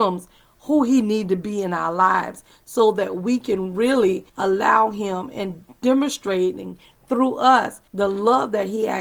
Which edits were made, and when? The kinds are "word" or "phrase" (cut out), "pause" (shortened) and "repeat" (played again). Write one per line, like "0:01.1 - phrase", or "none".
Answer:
0:04.3 - pause
0:05.8 - pause
0:07.9 - pause